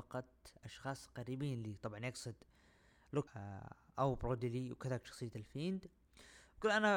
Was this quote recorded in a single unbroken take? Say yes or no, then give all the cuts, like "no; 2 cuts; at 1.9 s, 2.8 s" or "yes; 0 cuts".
no; 1 cut; at 3.3 s